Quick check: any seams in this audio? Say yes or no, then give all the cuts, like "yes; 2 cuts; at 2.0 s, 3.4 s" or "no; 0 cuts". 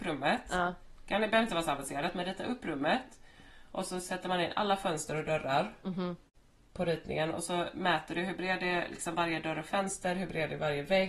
no; 0 cuts